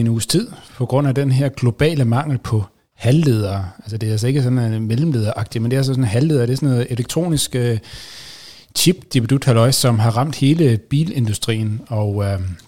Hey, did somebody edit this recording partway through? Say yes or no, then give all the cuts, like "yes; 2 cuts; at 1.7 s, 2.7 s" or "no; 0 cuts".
no; 0 cuts